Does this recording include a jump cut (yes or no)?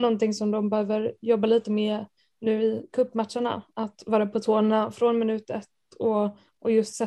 no